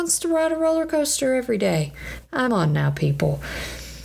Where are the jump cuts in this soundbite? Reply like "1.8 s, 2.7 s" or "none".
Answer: 2.5 s